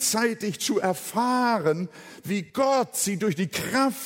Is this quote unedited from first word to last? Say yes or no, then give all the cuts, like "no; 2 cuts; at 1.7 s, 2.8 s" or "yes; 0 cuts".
no; 1 cut; at 2.5 s